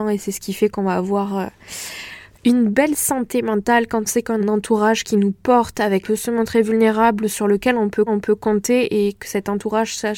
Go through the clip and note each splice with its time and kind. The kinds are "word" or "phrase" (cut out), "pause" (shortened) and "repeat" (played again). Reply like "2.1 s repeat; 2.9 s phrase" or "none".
4.1 s word; 4.4 s word; 6.0 s phrase; 8.1 s repeat

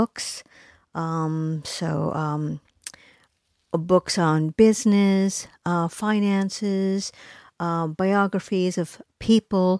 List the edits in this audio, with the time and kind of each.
none

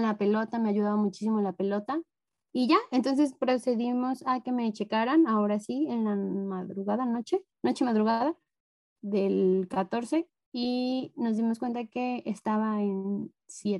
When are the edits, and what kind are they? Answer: 7.5 s pause

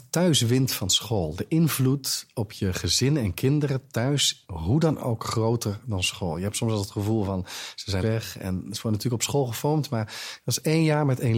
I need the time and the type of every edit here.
4.4 s word; 8.0 s phrase

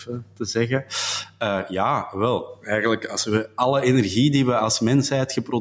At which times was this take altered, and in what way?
none

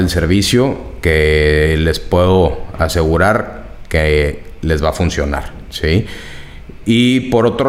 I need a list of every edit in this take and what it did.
none

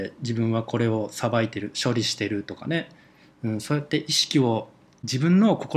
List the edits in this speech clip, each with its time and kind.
none

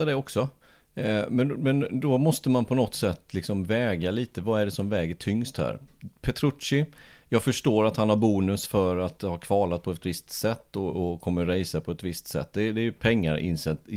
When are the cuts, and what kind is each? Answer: none

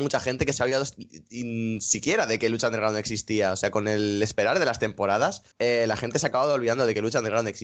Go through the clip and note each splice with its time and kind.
5.5 s pause

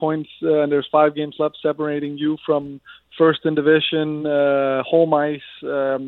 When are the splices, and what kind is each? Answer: none

